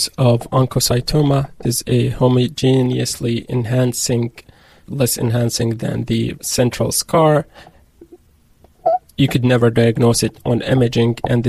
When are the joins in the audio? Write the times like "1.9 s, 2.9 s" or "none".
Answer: 1.6 s, 4.8 s, 6.3 s

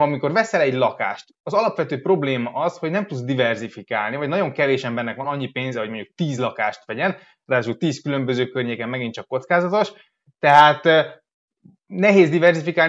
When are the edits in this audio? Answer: none

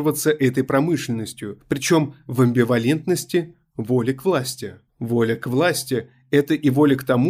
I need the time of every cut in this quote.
4.9 s

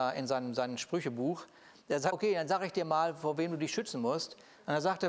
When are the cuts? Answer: 2.1 s

